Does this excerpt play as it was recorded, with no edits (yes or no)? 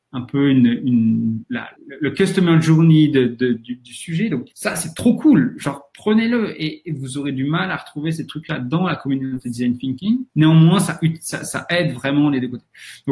no